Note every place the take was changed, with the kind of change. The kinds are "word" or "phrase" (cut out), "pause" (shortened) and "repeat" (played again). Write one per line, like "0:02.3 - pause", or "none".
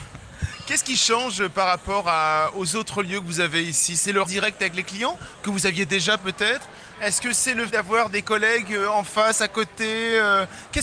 0:04.2 - word
0:07.7 - word